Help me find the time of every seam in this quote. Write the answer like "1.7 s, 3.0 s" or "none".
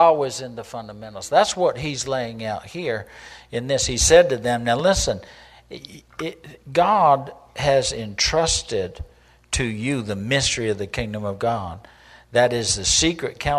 none